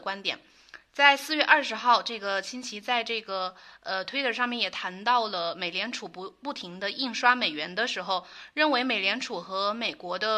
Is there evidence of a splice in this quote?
no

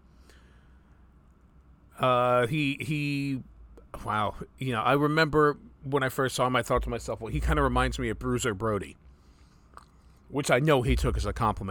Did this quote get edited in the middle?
no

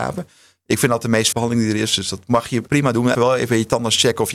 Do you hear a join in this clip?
yes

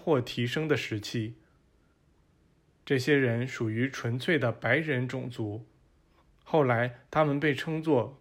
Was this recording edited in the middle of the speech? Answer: no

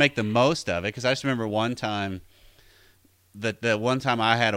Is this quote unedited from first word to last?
yes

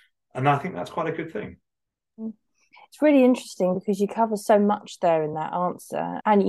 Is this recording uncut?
yes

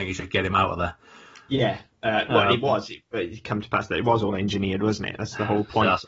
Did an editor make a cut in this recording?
no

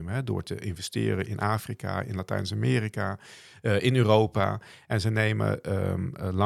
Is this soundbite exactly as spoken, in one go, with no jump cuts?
yes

